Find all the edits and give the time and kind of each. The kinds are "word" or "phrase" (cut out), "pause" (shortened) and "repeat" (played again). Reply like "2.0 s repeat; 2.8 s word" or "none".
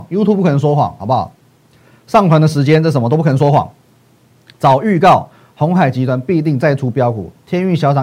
none